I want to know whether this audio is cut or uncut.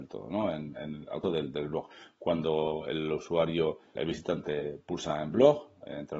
cut